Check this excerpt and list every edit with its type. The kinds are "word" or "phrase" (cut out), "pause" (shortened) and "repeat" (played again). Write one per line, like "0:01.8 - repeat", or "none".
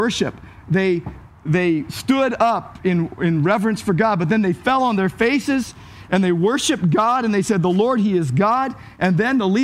none